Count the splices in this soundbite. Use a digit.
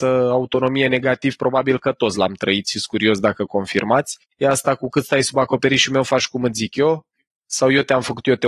1